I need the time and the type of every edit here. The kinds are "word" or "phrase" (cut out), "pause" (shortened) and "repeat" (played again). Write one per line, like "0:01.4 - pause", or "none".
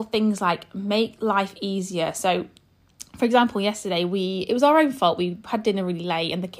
none